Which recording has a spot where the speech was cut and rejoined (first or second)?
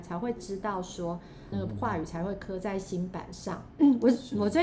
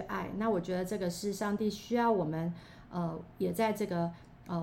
first